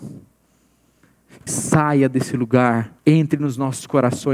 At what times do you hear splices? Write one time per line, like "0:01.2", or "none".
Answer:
0:01.5
0:03.0